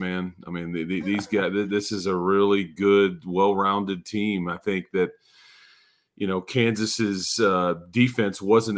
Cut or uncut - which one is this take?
uncut